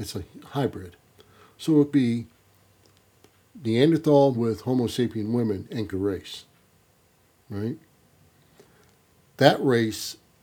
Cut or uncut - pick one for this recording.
cut